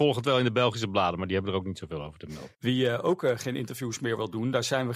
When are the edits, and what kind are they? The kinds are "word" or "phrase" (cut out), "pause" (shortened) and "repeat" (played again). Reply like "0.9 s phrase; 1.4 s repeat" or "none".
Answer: 2.5 s pause